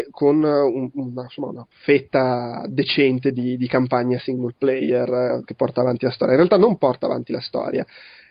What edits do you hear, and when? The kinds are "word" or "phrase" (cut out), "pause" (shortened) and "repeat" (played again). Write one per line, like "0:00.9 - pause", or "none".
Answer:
0:01.7 - pause